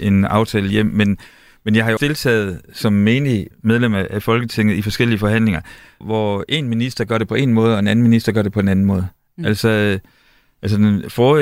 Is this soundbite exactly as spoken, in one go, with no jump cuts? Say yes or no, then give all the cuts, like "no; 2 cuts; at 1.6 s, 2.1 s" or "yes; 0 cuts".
no; 3 cuts; at 2.0 s, 3.5 s, 6.0 s